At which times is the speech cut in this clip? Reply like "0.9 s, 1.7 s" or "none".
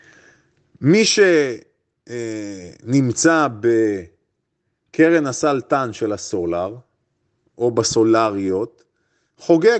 none